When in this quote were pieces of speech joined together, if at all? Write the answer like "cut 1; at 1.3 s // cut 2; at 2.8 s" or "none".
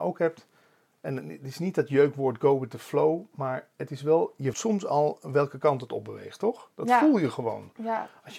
cut 1; at 4.5 s